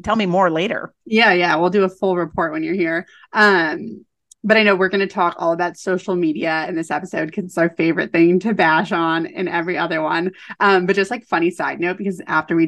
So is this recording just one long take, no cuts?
yes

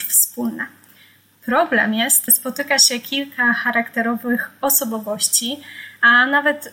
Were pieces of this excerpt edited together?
yes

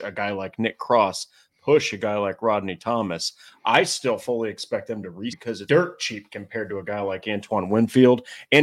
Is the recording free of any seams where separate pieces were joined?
no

